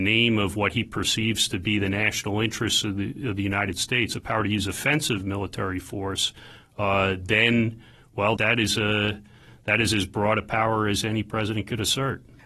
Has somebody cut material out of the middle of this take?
yes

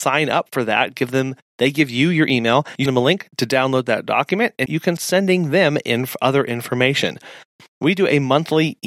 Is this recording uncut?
no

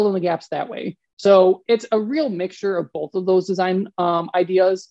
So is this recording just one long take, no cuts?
yes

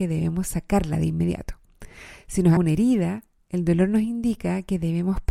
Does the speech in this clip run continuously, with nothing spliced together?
no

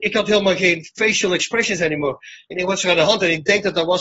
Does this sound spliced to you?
no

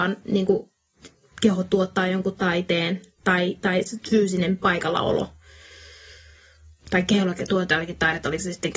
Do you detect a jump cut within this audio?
no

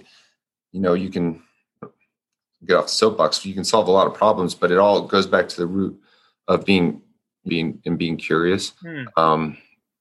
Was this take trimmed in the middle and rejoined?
yes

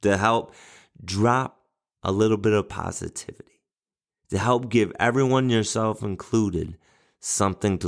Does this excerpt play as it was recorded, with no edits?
yes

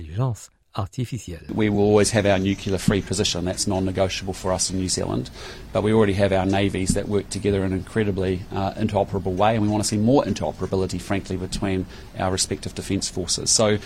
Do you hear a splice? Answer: no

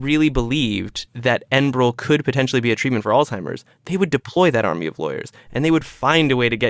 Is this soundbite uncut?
yes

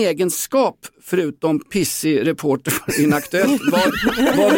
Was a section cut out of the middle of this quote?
no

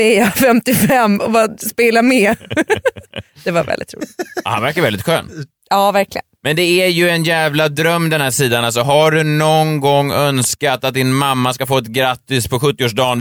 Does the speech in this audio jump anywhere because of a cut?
no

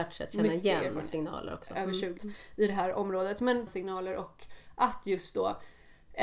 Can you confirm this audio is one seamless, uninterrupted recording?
no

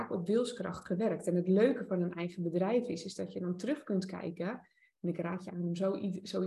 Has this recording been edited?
no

